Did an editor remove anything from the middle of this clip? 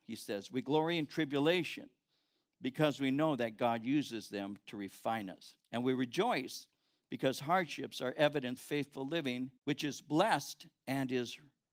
yes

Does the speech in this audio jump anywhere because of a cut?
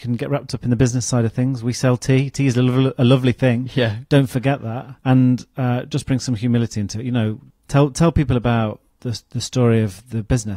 yes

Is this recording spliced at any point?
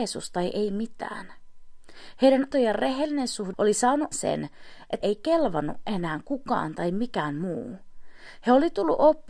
yes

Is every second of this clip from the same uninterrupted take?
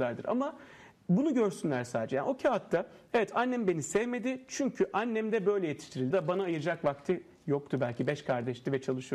no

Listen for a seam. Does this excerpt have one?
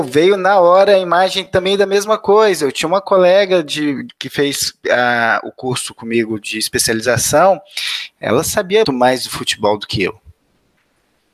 yes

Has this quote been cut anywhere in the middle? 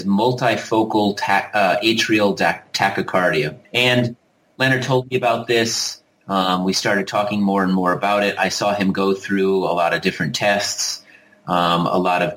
yes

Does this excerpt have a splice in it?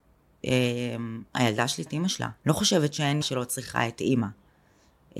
yes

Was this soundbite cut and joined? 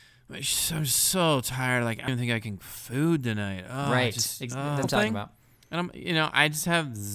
yes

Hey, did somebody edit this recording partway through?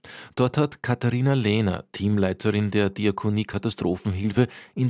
no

